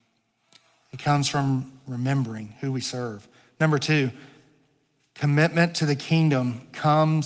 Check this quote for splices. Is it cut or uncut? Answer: uncut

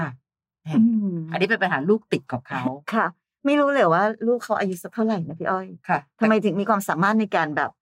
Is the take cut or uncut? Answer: uncut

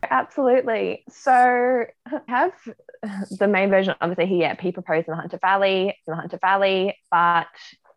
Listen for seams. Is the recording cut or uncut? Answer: cut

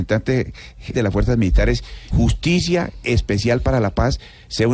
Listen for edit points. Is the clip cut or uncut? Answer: cut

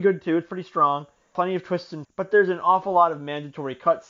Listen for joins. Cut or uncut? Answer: cut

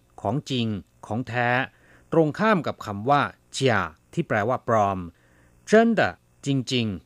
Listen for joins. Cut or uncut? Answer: uncut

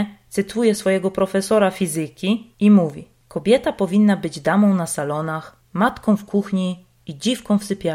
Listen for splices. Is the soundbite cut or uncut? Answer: uncut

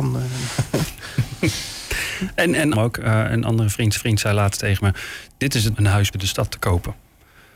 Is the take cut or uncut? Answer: cut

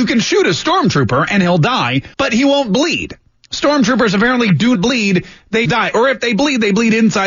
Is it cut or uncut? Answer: cut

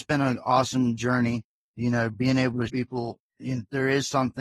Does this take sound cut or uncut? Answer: cut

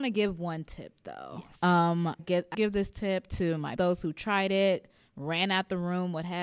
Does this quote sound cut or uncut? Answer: cut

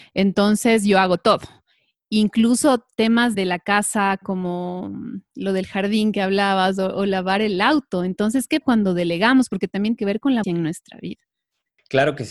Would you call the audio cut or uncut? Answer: cut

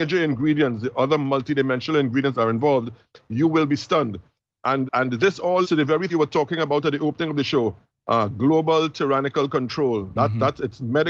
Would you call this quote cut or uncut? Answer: cut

